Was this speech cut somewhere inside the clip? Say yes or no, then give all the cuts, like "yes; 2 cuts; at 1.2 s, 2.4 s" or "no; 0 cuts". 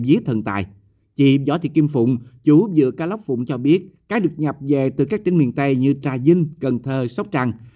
yes; 1 cut; at 3.5 s